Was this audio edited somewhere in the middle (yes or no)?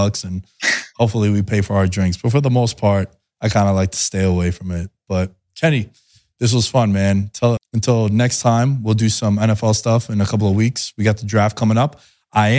yes